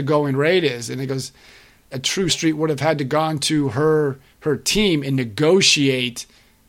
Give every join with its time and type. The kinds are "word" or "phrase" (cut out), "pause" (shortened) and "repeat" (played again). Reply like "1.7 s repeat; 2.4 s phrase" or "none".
1.9 s phrase; 2.3 s phrase